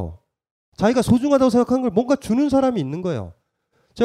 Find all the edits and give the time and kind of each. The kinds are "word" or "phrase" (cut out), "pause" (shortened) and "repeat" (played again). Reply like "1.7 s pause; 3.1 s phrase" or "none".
none